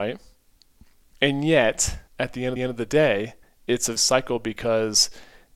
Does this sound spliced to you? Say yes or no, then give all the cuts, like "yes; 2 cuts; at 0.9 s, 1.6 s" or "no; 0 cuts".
yes; 4 cuts; at 2.1 s, 2.6 s, 3.4 s, 4.0 s